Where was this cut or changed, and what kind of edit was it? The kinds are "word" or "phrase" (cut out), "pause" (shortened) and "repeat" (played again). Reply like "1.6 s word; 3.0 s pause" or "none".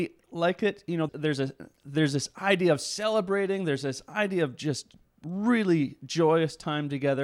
1.1 s word